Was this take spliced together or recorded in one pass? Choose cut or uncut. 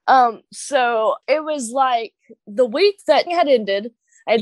cut